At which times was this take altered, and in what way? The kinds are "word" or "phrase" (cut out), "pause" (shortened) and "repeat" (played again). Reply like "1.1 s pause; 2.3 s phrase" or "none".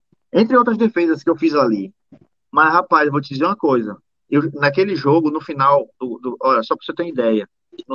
none